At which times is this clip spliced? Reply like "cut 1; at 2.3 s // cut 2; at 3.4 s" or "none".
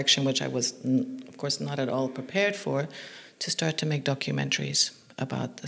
none